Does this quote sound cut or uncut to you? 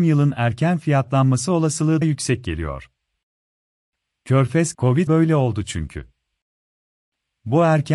cut